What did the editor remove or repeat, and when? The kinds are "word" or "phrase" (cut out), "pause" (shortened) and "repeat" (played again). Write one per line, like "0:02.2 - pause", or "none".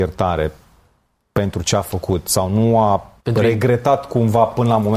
0:03.2 - pause